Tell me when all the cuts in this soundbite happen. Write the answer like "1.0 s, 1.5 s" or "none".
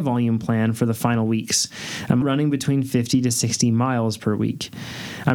2.2 s